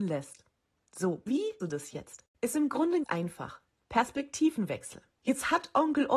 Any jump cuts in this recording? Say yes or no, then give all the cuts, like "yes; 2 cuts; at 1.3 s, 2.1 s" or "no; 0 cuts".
yes; 4 cuts; at 1.3 s, 1.6 s, 2.3 s, 3.0 s